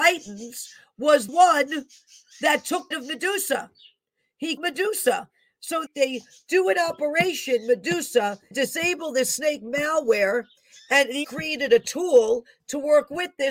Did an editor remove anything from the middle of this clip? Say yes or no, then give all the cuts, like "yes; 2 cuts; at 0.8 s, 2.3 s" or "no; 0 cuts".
yes; 6 cuts; at 1.3 s, 2.9 s, 4.6 s, 5.9 s, 8.5 s, 11.2 s